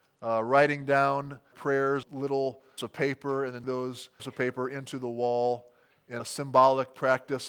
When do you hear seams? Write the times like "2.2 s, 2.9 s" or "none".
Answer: 1.5 s, 2.0 s, 2.8 s, 3.6 s, 4.2 s, 6.2 s